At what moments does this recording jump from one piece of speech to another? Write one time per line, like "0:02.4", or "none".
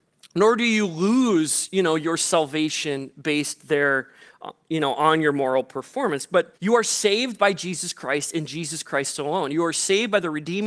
0:06.6